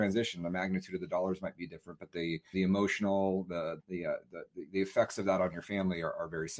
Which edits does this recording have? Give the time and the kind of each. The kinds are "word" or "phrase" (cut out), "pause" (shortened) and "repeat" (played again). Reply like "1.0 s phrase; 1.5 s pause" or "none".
2.5 s word; 3.8 s word